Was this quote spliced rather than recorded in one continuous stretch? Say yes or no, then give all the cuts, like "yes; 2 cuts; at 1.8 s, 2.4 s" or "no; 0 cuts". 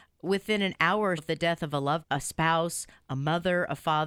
yes; 2 cuts; at 1.2 s, 2.0 s